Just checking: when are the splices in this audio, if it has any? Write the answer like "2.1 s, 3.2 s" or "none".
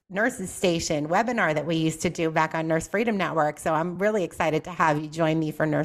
none